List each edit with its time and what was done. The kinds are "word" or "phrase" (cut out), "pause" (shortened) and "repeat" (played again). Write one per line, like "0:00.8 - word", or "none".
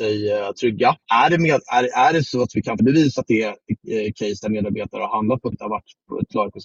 0:01.0 - pause
0:02.8 - phrase
0:05.5 - phrase